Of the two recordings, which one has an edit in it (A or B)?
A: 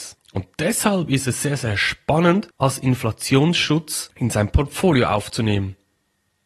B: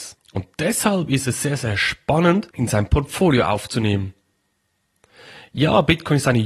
B